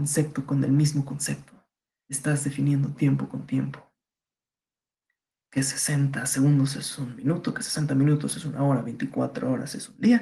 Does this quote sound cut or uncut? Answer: uncut